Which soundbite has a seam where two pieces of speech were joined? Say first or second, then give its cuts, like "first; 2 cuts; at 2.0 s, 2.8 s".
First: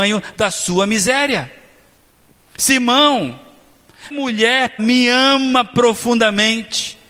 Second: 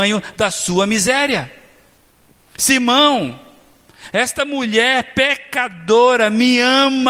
first; 2 cuts; at 4.1 s, 4.8 s